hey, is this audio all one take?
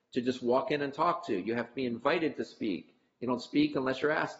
yes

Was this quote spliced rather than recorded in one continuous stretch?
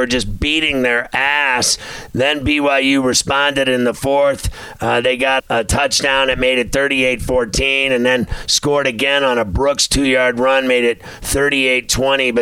yes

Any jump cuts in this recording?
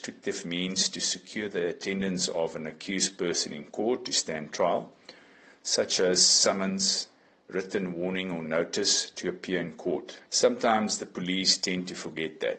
yes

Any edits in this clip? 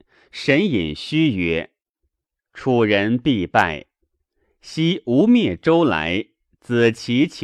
no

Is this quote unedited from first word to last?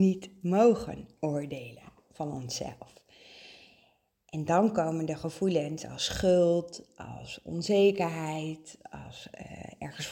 yes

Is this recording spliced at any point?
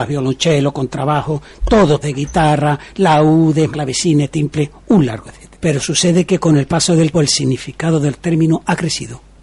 yes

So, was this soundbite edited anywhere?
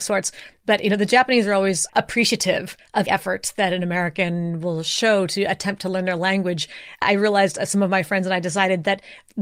yes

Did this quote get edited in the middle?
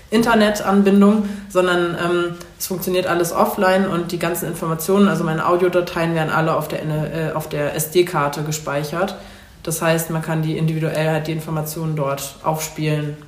no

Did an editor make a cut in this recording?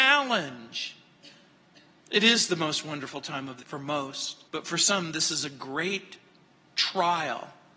yes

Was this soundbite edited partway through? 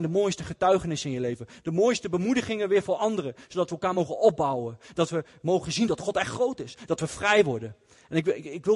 no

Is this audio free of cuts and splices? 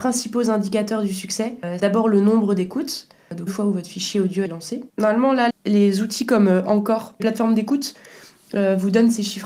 no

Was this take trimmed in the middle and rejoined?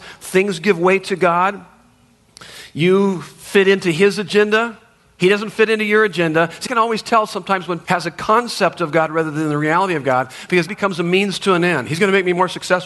yes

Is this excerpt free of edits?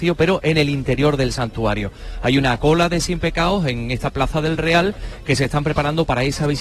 yes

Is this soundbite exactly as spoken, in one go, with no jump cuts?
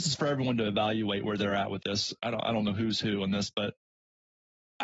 yes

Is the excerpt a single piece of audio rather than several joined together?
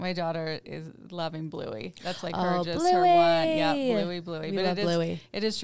yes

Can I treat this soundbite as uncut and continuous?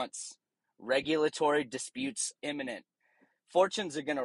no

